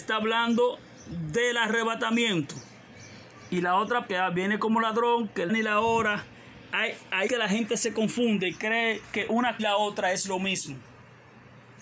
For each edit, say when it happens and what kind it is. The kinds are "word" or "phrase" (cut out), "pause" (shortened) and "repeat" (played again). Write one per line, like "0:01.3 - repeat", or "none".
0:04.1 - word
0:05.5 - word
0:07.3 - word
0:09.6 - phrase